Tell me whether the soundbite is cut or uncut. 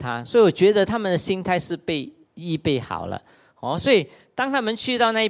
uncut